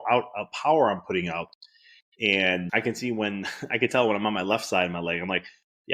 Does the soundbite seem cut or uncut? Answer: cut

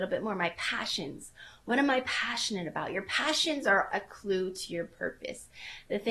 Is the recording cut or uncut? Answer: cut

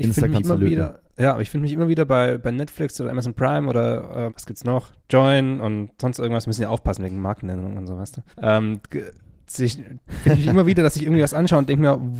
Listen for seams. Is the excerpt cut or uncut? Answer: cut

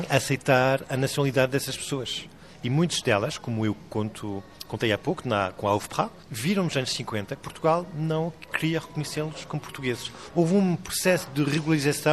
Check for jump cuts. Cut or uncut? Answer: uncut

